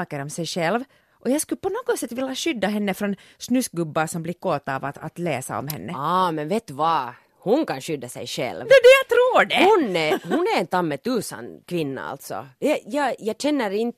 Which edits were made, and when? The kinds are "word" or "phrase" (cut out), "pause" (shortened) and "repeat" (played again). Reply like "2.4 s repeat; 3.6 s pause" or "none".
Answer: 1.0 s pause; 11.6 s pause; 12.6 s pause